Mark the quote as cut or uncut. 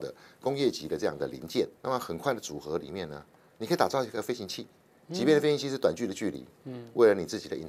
cut